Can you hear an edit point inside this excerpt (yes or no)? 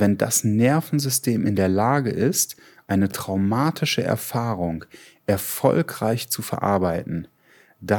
no